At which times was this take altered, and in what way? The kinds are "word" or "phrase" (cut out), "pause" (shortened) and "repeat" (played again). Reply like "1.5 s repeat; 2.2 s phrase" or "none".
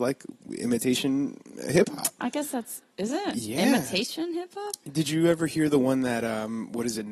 2.9 s pause

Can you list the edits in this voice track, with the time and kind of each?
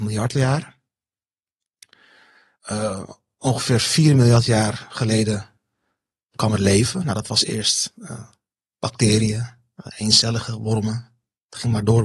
none

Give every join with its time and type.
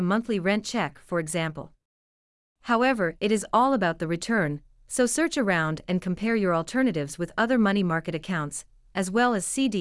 none

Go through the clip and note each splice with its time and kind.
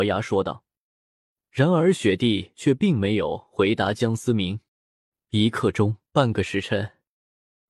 4.7 s pause; 6.1 s pause

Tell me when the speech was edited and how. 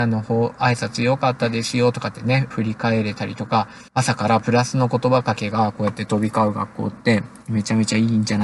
2.5 s phrase; 3.9 s pause

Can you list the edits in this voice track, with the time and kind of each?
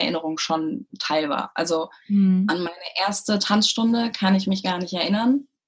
none

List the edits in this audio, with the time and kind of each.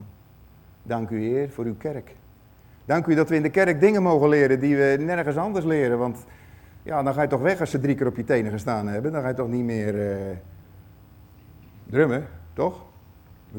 none

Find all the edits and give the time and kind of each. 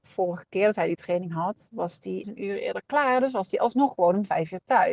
2.2 s word

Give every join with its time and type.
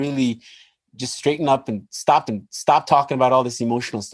2.3 s repeat

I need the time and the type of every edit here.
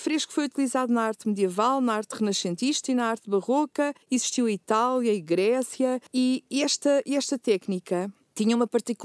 4.0 s pause

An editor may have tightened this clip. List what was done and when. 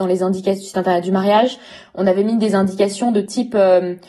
none

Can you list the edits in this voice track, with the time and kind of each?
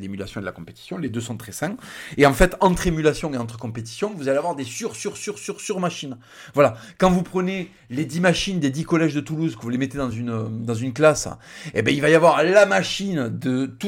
none

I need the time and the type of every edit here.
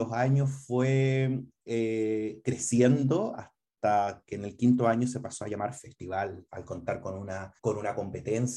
7.6 s pause

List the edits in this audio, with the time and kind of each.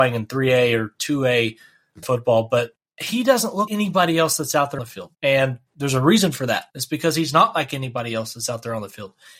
2.0 s word; 2.8 s pause; 3.7 s word; 4.8 s word; 5.1 s pause; 6.7 s pause

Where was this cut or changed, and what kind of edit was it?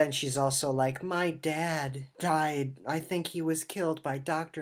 none

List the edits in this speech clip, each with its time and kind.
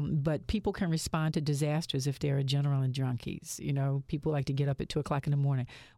none

